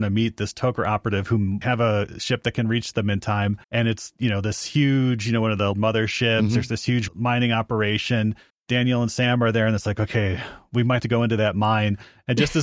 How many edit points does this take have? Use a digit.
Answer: 6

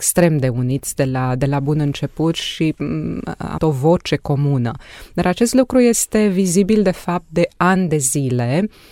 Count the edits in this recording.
1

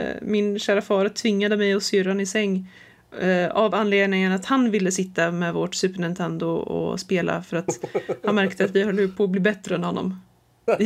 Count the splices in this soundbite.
0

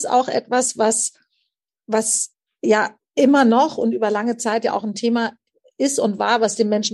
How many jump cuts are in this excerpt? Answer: 1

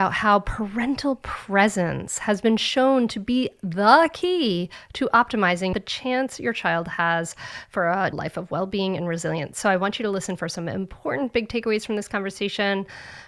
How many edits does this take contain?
0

